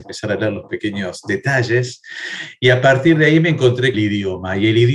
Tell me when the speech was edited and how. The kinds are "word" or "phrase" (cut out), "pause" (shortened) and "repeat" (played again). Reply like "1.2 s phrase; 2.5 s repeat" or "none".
3.9 s phrase